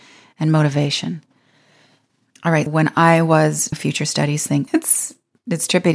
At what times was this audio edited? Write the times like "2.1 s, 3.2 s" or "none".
2.7 s, 3.7 s, 4.7 s